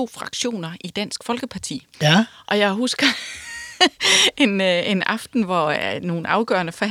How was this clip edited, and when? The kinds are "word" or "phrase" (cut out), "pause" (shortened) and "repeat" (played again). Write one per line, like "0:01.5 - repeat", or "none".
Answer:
0:01.9 - pause